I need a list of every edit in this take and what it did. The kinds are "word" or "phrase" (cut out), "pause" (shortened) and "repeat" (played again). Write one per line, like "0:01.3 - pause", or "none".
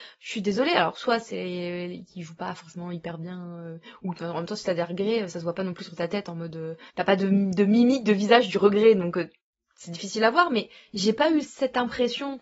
0:06.9 - pause